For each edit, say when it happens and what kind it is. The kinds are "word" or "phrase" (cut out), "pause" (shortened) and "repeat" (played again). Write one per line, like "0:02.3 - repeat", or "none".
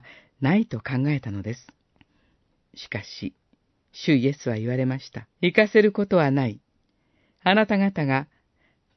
0:01.9 - pause
0:05.3 - pause